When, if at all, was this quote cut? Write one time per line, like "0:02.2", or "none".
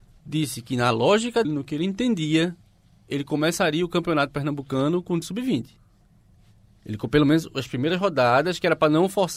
0:01.4
0:05.2

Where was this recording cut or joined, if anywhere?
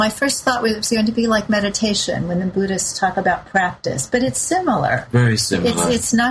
none

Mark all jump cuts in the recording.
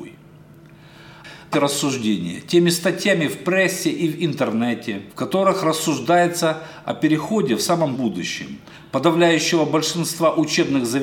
0:01.5
0:05.1
0:07.9

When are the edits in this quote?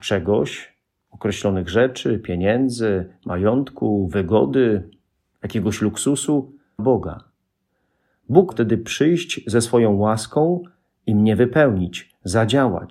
0:06.8
0:08.5

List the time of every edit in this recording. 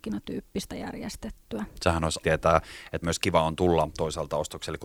0:02.2
0:03.0

